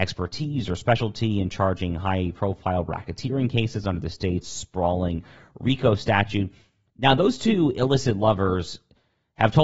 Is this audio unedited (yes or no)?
yes